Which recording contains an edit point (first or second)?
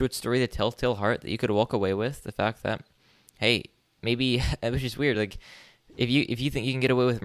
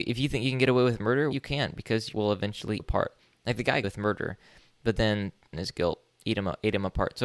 second